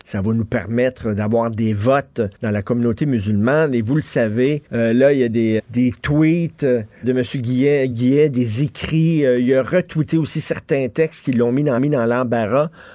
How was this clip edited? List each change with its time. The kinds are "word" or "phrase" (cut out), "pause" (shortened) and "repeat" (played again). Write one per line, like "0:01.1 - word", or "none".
0:02.3 - pause
0:04.7 - pause
0:05.6 - word
0:07.0 - word
0:07.9 - word
0:11.8 - repeat